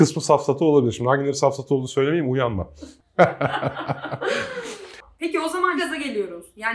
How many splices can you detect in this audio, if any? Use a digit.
1